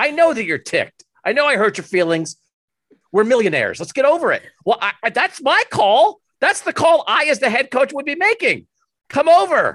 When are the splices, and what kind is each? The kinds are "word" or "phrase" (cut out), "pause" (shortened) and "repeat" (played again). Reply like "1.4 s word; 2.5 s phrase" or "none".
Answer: none